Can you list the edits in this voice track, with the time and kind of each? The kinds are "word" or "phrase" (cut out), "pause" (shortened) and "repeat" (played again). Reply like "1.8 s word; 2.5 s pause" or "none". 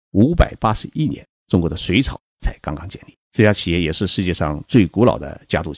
1.3 s pause; 3.2 s pause